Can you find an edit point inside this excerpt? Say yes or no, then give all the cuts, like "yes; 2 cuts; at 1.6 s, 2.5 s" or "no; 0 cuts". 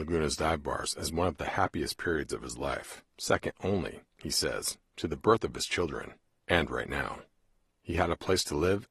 yes; 1 cut; at 3.1 s